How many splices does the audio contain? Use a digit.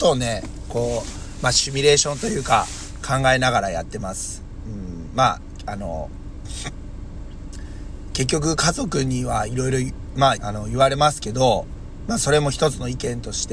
1